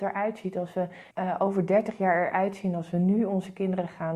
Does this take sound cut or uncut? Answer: cut